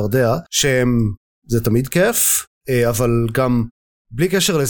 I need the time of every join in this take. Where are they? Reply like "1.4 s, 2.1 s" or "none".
none